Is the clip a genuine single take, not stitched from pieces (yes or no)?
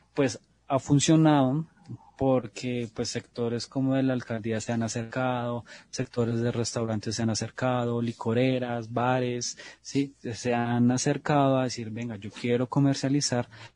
yes